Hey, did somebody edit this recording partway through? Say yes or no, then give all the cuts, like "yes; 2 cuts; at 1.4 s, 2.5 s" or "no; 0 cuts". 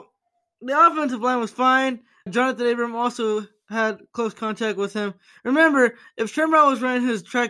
yes; 1 cut; at 2.3 s